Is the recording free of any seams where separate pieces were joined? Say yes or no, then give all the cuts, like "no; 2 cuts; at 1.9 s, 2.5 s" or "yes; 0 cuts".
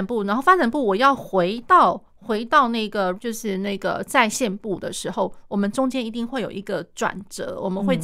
no; 2 cuts; at 2.1 s, 3.1 s